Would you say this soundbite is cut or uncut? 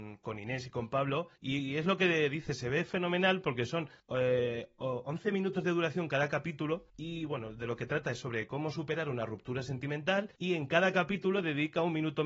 cut